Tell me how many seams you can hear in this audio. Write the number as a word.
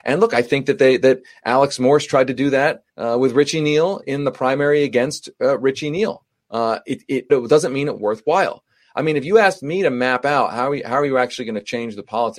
four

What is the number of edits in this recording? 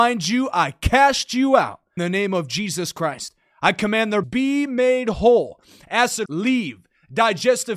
three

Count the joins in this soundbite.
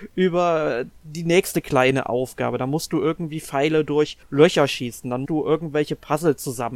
two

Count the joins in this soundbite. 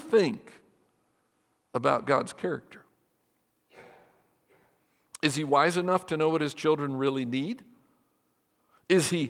zero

